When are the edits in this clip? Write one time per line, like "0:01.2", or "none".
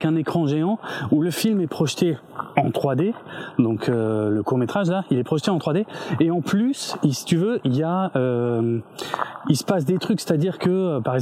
none